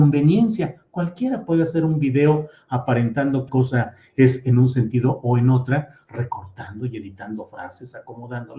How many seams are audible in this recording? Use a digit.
1